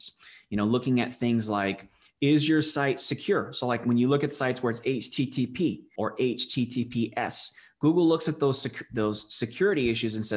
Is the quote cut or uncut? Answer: uncut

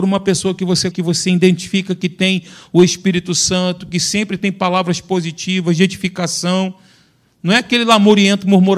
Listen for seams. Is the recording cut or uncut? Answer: cut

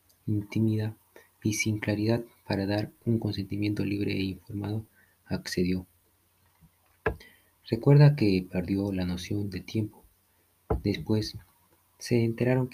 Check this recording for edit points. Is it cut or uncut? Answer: uncut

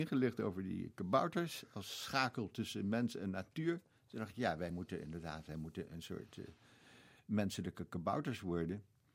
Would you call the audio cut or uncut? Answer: uncut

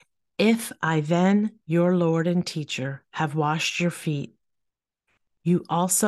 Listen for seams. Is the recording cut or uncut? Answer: uncut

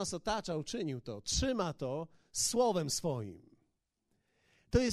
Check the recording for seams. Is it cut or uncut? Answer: uncut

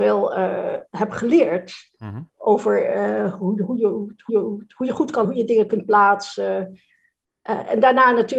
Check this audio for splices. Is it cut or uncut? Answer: cut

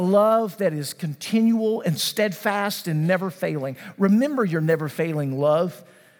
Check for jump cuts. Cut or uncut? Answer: uncut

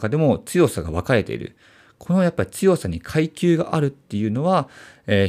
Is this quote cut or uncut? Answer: uncut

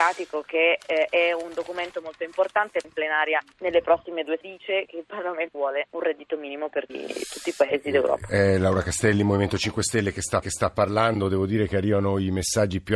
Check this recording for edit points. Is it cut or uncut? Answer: cut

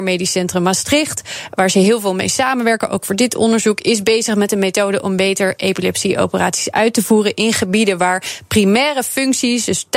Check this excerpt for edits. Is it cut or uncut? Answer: uncut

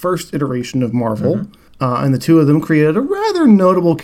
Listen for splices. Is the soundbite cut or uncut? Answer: uncut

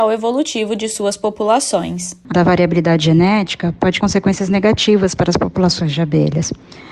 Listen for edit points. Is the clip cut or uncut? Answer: cut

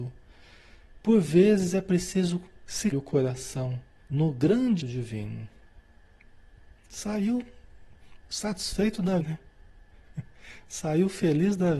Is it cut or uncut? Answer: cut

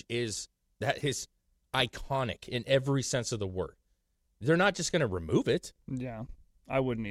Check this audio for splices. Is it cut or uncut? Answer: uncut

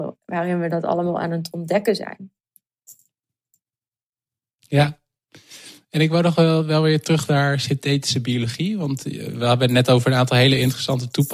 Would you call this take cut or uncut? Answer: uncut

